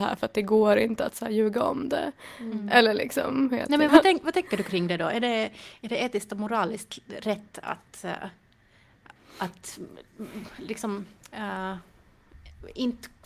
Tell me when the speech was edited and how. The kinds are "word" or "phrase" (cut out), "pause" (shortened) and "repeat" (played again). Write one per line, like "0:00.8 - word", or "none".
0:03.9 - word
0:09.2 - pause
0:11.3 - pause